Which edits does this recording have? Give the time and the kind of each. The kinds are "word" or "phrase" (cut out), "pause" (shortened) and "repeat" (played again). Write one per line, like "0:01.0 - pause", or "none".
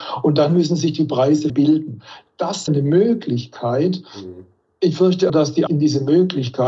0:01.5 - word
0:02.7 - word
0:05.3 - word
0:05.7 - word